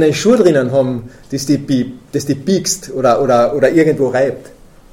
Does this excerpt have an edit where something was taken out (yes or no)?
no